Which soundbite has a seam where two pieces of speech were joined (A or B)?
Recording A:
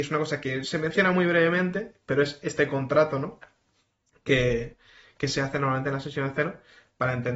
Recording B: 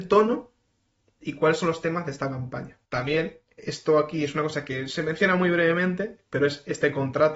B